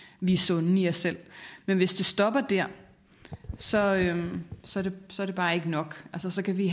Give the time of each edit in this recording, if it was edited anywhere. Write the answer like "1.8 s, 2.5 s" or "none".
none